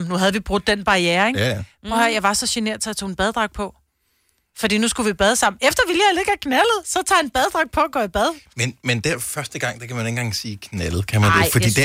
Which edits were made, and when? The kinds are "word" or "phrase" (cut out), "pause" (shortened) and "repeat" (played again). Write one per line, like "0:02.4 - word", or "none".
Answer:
0:08.8 - word